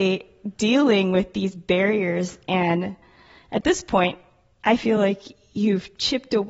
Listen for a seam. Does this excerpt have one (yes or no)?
no